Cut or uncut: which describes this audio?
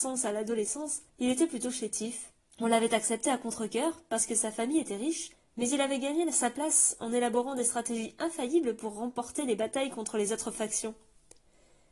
cut